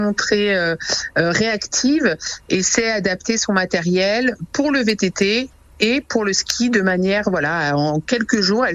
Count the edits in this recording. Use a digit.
0